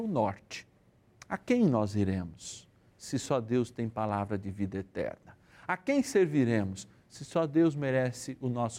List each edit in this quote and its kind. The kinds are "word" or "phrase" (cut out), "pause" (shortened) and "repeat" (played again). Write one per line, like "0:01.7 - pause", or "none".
none